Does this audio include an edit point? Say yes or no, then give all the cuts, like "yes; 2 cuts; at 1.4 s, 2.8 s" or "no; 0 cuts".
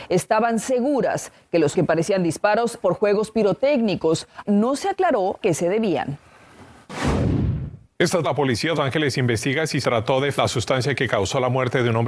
yes; 8 cuts; at 1.7 s, 2.8 s, 4.5 s, 5.4 s, 8.2 s, 8.8 s, 9.8 s, 10.4 s